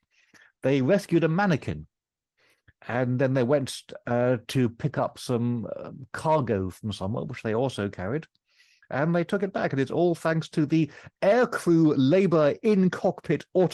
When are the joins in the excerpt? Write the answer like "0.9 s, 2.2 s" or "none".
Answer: none